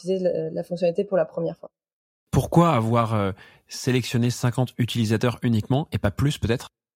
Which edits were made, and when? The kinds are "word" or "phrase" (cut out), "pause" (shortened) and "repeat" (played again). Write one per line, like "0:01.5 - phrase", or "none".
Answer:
none